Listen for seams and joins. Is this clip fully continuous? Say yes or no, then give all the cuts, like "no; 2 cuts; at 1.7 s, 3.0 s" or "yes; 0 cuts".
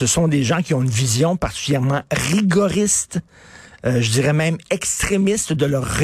yes; 0 cuts